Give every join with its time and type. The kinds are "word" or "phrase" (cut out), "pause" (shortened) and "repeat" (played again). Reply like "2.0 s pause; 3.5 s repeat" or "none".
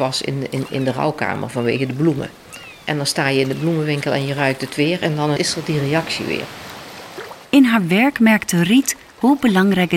5.4 s word; 7.4 s pause